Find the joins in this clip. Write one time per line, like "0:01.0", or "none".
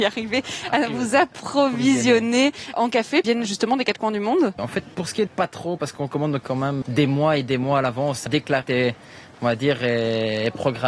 0:02.7
0:03.2
0:04.6
0:04.9
0:05.3
0:06.4
0:06.8
0:08.3
0:08.6